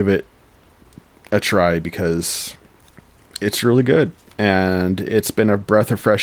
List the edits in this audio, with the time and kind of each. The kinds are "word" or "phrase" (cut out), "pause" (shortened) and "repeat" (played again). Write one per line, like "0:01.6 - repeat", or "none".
none